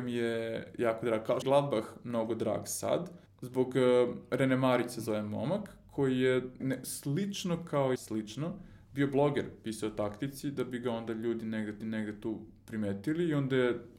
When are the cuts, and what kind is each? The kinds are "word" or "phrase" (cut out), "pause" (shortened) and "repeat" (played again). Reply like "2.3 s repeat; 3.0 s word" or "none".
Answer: 1.4 s phrase; 3.3 s pause; 6.6 s word; 7.9 s word; 11.8 s repeat